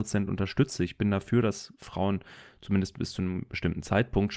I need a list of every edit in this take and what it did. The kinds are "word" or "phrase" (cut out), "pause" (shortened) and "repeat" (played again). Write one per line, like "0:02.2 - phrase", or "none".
none